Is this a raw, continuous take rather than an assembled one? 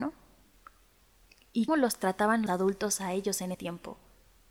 no; 3 cuts; at 1.7 s, 2.5 s, 3.5 s

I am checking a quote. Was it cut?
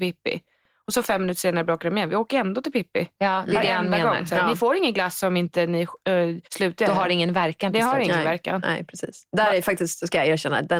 yes; 1 cut; at 6.4 s

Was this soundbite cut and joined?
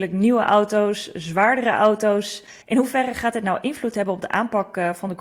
yes; 1 cut; at 2.6 s

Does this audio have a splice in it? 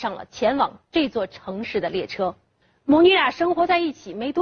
no; 0 cuts

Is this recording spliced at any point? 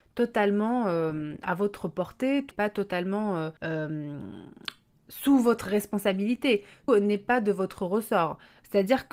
yes; 3 cuts; at 2.5 s, 3.6 s, 6.9 s

